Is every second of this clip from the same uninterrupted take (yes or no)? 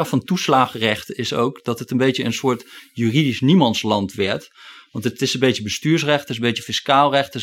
yes